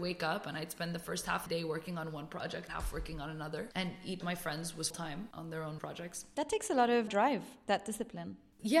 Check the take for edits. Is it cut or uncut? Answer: cut